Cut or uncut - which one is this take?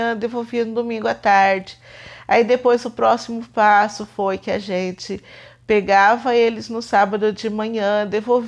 uncut